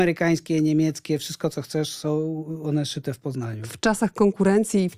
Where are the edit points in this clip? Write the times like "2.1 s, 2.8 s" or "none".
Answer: none